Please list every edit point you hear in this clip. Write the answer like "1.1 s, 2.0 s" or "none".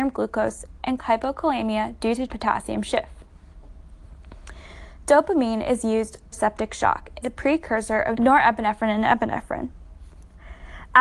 1.0 s, 2.3 s, 6.3 s, 7.2 s, 8.1 s